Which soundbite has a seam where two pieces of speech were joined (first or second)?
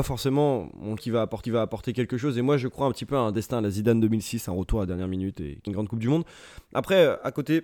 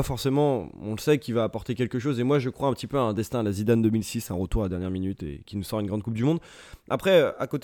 first